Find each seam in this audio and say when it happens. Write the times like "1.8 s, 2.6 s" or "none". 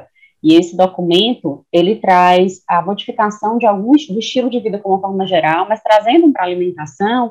6.3 s